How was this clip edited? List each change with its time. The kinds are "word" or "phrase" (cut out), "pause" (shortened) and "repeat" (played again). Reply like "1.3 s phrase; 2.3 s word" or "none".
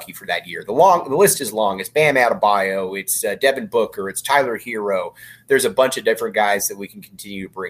none